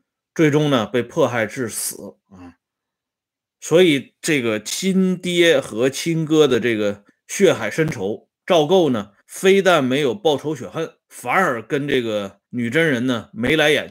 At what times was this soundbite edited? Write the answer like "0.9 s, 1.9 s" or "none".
2.2 s, 7.1 s, 8.4 s, 9.2 s, 11.0 s, 12.4 s